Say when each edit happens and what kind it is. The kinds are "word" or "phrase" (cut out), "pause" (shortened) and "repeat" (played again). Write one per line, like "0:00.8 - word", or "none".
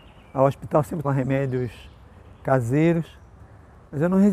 0:01.0 - word